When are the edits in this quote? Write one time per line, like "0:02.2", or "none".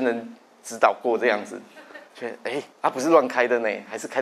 0:02.1
0:02.7